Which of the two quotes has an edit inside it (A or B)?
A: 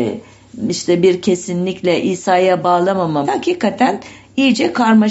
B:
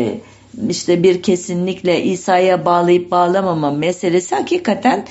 A